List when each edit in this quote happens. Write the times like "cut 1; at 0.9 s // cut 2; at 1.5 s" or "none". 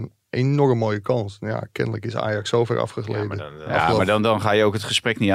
none